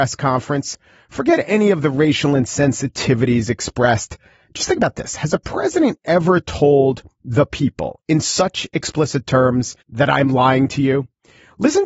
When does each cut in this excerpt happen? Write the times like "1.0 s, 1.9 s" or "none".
9.8 s